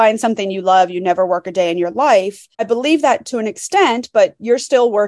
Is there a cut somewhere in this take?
yes; 1 cut; at 2.5 s

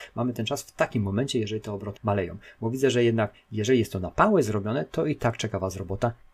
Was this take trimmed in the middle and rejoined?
yes; 1 cut; at 2.0 s

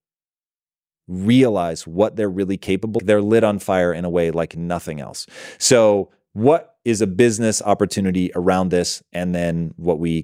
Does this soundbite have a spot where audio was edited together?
yes; 1 cut; at 3.0 s

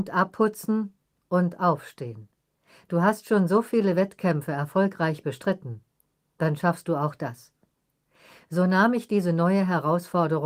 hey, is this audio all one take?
yes; 0 cuts

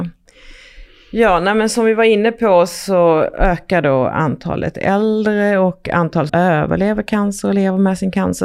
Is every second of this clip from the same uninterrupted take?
no; 1 cut; at 6.3 s

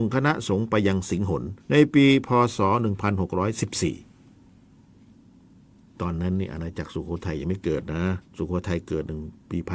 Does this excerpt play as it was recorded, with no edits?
no; 2 cuts; at 1.6 s, 8.3 s

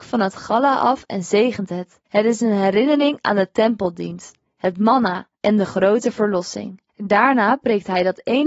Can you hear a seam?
yes; 3 cuts; at 2.1 s, 5.3 s, 6.9 s

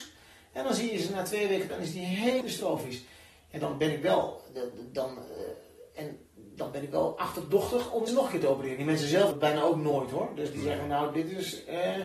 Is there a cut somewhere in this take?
yes; 4 cuts; at 1.7 s, 2.4 s, 8.1 s, 9.3 s

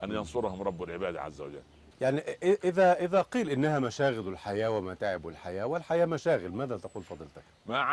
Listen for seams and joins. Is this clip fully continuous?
no; 1 cut; at 1.9 s

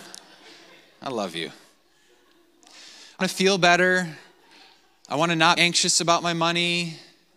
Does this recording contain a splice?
yes; 2 cuts; at 3.2 s, 5.6 s

